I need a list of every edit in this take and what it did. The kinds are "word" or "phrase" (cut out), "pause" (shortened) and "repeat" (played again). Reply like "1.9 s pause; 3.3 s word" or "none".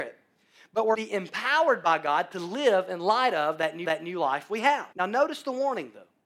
0.9 s phrase; 3.8 s repeat; 4.9 s pause